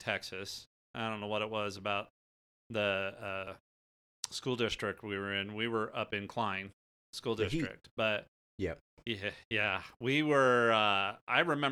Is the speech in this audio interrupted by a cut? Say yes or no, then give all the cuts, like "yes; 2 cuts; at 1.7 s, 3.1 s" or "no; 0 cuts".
no; 0 cuts